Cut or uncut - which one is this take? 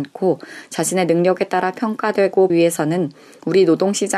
cut